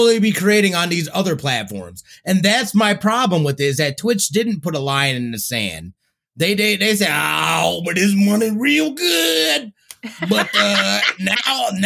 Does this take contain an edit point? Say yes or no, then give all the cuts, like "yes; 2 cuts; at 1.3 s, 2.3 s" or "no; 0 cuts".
no; 0 cuts